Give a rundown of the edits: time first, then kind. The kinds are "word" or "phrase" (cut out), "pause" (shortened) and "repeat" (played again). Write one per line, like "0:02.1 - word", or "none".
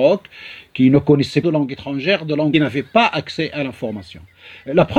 0:01.4 - word
0:02.5 - phrase